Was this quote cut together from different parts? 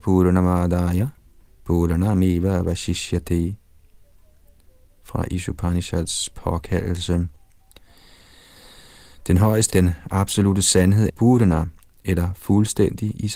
yes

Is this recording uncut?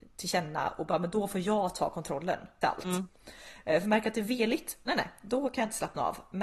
no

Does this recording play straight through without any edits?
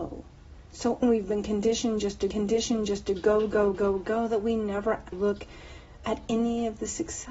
no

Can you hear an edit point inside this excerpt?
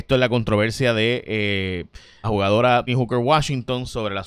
yes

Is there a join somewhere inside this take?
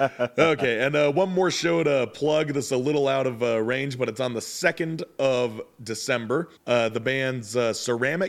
yes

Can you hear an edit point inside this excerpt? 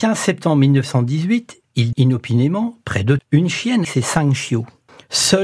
yes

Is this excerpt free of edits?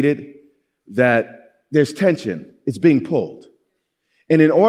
yes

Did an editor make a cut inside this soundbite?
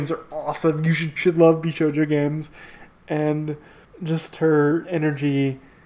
yes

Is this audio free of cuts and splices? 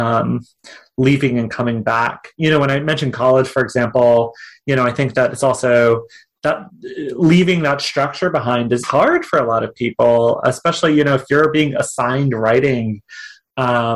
no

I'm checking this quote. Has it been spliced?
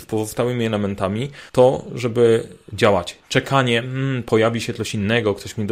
yes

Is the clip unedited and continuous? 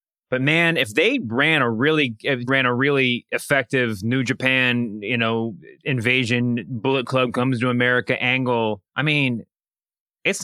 no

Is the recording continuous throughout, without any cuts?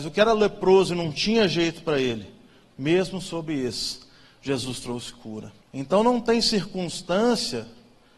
no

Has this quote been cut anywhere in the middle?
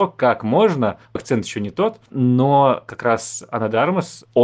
yes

